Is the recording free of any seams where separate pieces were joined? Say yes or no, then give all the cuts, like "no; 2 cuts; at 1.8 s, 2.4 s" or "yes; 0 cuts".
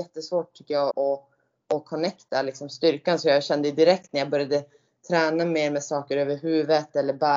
no; 1 cut; at 0.9 s